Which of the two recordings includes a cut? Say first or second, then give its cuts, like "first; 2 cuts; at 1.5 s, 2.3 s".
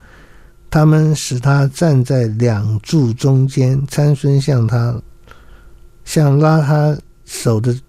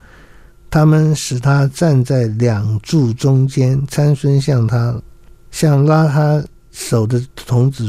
second; 1 cut; at 5.3 s